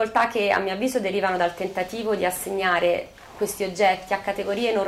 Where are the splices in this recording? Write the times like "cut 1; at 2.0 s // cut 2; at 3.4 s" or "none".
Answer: none